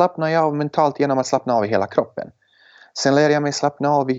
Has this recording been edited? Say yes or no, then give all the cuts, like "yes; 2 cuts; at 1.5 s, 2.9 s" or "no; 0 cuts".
no; 0 cuts